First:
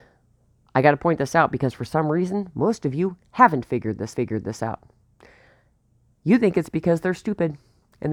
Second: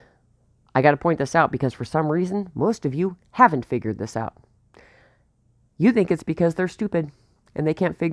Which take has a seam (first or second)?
first